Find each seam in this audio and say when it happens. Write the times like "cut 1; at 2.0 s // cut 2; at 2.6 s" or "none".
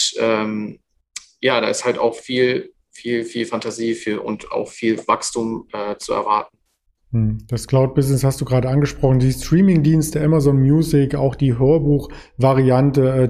none